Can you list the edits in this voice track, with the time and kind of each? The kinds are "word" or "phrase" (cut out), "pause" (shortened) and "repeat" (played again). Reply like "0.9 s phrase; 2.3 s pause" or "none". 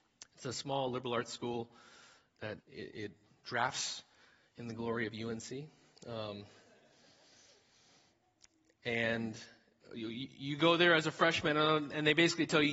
2.6 s word